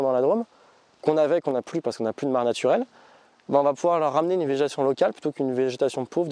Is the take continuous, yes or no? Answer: yes